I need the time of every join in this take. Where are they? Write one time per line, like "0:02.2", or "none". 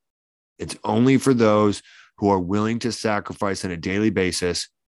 none